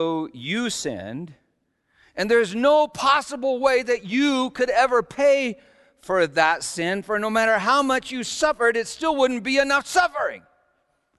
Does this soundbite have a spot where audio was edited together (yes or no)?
no